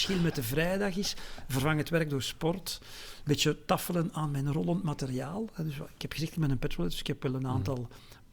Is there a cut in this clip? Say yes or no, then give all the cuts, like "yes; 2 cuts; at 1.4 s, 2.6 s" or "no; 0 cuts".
no; 0 cuts